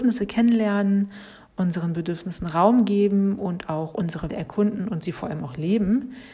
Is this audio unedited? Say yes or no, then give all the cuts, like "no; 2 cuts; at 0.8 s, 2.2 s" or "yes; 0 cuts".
no; 1 cut; at 4.3 s